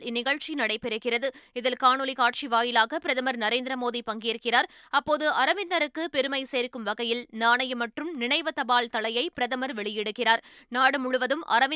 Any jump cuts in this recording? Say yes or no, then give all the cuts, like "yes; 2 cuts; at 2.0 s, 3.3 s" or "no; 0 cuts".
no; 0 cuts